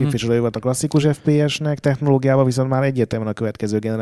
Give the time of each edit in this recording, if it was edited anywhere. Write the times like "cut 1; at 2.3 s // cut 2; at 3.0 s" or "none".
none